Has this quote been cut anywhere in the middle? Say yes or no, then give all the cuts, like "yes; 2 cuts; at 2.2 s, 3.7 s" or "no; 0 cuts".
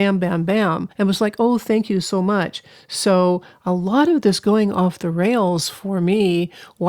yes; 1 cut; at 0.9 s